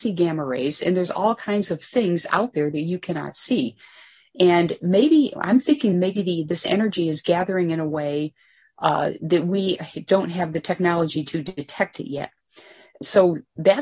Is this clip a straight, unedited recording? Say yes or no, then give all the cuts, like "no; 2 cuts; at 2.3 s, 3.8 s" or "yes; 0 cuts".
yes; 0 cuts